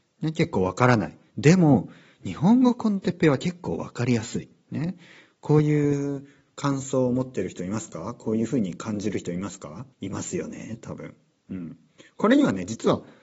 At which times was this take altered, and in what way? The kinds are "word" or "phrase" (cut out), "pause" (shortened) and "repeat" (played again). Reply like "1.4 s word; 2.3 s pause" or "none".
9.9 s pause